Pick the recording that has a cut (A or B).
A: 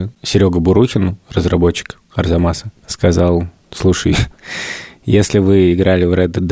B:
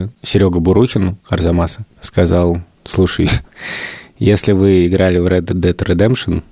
B